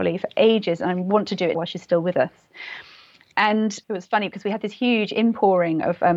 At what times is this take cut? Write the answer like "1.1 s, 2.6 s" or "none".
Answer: 1.5 s, 3.8 s